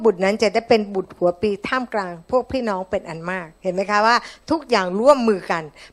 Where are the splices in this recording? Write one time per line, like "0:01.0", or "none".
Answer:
0:03.6